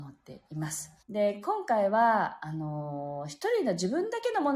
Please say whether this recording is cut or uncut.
cut